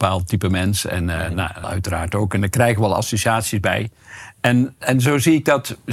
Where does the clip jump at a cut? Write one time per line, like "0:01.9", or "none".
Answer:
0:01.6